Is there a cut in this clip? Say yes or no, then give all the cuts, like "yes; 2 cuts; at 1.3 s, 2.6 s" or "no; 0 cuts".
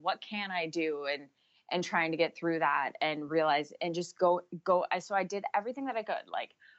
no; 0 cuts